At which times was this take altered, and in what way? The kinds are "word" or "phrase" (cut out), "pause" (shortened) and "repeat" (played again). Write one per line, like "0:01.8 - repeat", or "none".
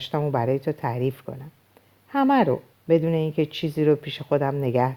0:02.7 - pause